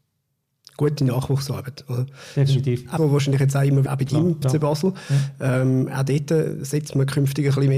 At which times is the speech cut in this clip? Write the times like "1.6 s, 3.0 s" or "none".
3.0 s, 3.9 s, 4.4 s